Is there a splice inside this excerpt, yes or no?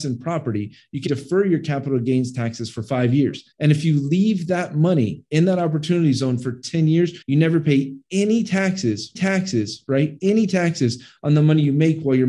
yes